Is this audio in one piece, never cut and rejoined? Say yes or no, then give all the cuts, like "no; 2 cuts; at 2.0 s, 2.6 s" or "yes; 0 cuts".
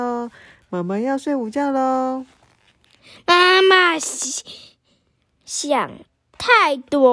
yes; 0 cuts